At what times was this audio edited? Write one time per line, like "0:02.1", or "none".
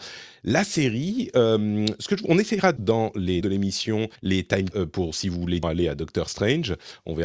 0:02.8
0:03.4
0:04.2
0:04.7
0:05.6